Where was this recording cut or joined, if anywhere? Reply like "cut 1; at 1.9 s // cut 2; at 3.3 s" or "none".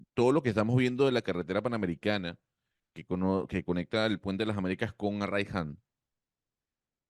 none

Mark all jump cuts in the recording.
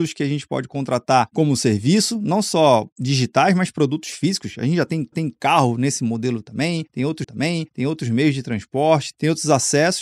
cut 1; at 2.9 s // cut 2; at 5.1 s // cut 3; at 7.2 s

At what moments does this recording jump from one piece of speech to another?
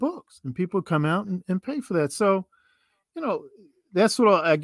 none

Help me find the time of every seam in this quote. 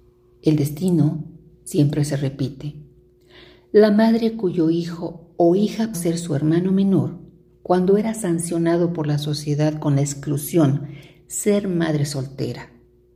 cut 1; at 5.9 s

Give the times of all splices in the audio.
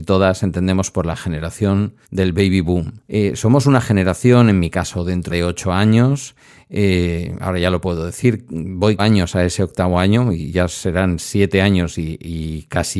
cut 1; at 2.0 s // cut 2; at 3.0 s // cut 3; at 5.3 s // cut 4; at 9.0 s

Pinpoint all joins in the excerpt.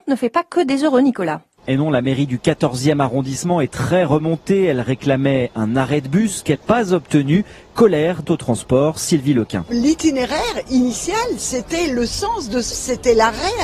cut 1; at 6.6 s // cut 2; at 8.2 s // cut 3; at 12.7 s

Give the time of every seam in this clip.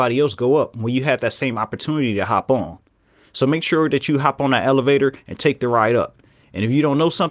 none

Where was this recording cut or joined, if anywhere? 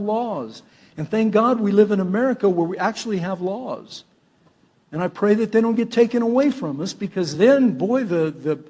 none

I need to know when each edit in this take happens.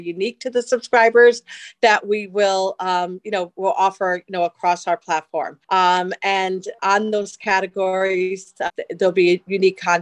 cut 1; at 5.6 s // cut 2; at 6.8 s // cut 3; at 8.7 s

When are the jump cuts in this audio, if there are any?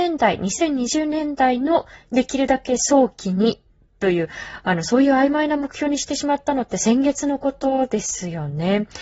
none

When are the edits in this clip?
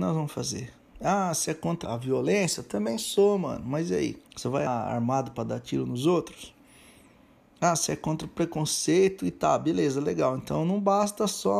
cut 1; at 1.8 s // cut 2; at 4.3 s // cut 3; at 4.7 s

